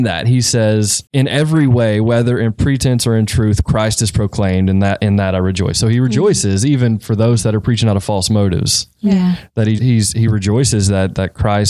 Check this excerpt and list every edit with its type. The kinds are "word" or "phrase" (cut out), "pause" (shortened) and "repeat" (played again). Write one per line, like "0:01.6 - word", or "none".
0:09.8 - word